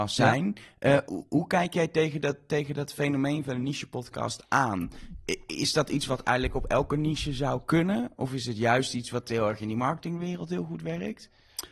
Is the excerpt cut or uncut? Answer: cut